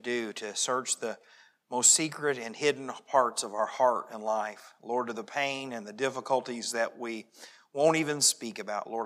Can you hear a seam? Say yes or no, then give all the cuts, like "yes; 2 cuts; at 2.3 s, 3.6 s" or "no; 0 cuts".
no; 0 cuts